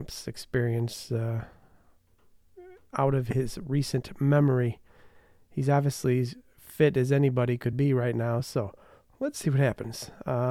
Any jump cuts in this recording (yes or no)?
no